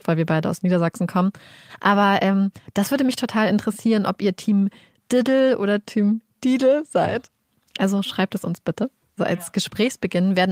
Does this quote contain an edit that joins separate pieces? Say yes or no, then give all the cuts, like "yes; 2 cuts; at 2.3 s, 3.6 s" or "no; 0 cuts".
no; 0 cuts